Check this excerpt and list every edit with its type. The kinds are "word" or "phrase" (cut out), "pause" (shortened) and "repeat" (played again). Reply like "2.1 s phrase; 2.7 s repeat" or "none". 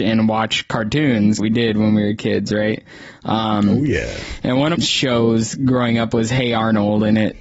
1.4 s phrase; 4.8 s phrase